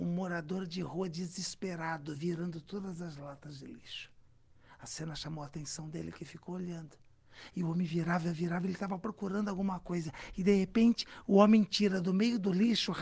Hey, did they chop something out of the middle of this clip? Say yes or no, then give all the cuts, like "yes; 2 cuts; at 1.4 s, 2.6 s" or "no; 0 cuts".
no; 0 cuts